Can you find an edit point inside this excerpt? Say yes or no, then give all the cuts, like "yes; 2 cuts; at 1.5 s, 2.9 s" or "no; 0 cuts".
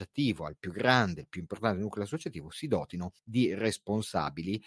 yes; 1 cut; at 3.2 s